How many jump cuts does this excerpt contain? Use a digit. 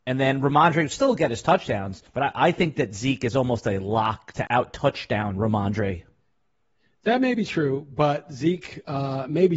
2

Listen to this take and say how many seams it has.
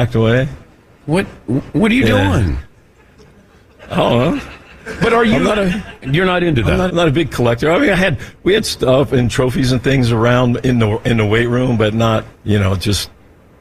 2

